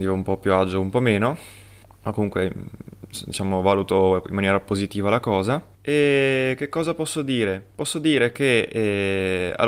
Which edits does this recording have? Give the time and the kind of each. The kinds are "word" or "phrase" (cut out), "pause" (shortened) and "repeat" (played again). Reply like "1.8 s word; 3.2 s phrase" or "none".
1.8 s pause; 5.7 s pause; 7.7 s pause

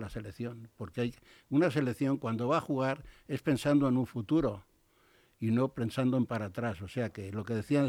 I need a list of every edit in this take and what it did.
none

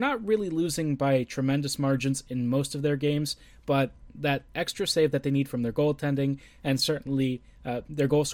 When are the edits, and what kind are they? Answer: none

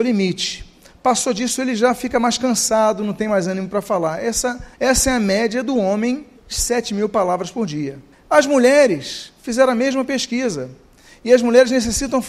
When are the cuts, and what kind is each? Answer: 4.7 s pause; 6.4 s pause; 8.1 s pause

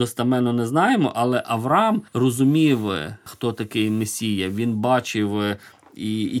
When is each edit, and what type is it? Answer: 2.1 s pause

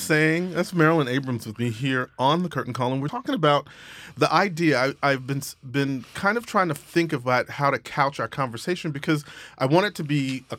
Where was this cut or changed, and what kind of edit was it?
3.1 s word

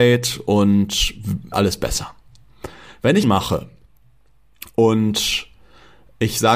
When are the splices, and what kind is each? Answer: 1.5 s phrase; 3.2 s phrase

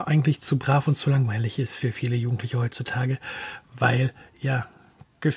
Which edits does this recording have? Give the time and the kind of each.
none

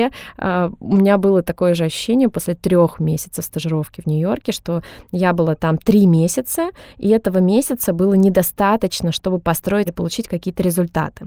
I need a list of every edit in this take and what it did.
9.9 s word

